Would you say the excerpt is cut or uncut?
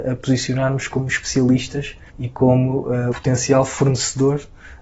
cut